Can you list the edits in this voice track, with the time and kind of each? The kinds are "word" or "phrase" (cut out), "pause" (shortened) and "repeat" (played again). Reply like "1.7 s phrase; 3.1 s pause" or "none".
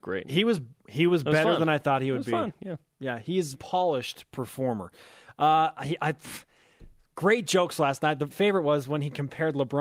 3.5 s word; 8.3 s word

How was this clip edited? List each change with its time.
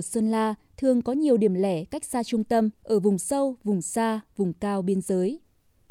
2.8 s pause

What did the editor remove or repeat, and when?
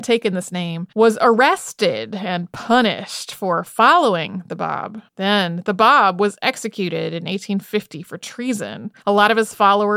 0.9 s pause; 5.1 s pause; 9.0 s pause

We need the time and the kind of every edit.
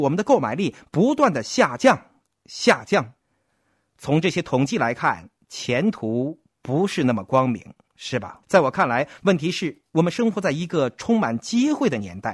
8.4 s pause

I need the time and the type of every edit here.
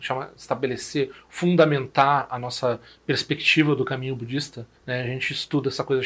4.8 s pause

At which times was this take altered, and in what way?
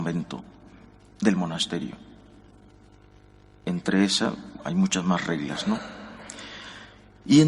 none

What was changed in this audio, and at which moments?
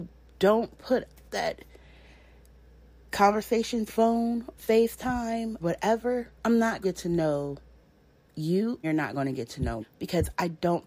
1.3 s word; 3.9 s word; 4.6 s word; 5.6 s word; 6.4 s word; 6.8 s word; 8.8 s word; 9.8 s word

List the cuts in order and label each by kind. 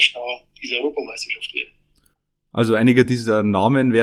none

